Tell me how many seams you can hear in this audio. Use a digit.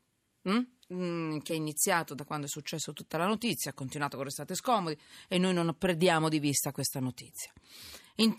0